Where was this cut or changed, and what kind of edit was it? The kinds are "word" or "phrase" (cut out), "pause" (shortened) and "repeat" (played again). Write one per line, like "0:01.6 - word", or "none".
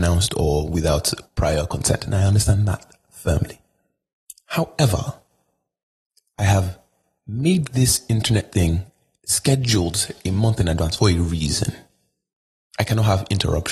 none